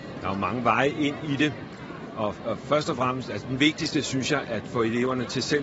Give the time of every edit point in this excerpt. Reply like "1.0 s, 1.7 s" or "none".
4.4 s

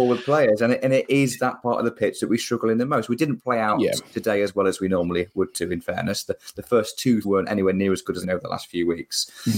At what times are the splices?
4.1 s, 7.2 s, 8.2 s

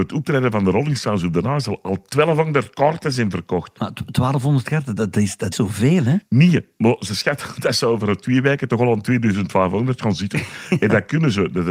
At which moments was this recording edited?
5.0 s, 5.5 s

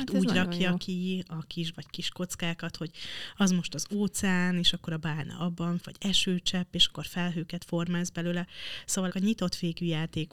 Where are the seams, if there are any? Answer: 1.7 s, 5.8 s, 9.1 s

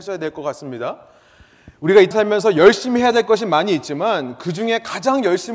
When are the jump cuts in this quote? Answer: 2.1 s

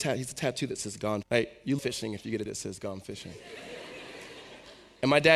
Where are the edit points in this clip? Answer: 1.2 s, 1.8 s, 2.5 s

